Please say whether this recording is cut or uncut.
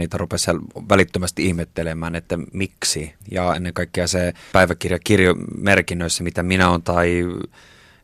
cut